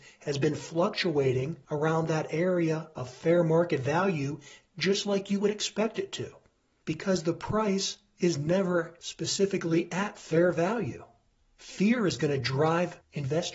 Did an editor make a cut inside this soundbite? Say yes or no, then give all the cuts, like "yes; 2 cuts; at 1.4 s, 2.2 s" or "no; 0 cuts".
no; 0 cuts